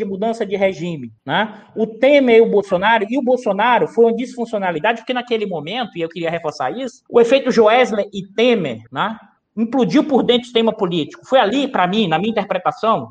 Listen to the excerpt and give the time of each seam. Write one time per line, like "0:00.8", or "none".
0:01.2
0:07.1
0:08.9